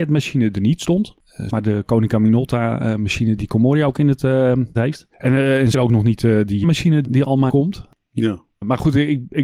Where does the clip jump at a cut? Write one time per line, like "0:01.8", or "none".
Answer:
0:01.5
0:03.4
0:04.7
0:05.7
0:06.6
0:07.0
0:07.5